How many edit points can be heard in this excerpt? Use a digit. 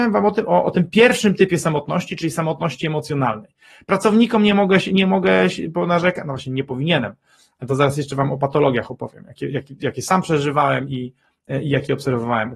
0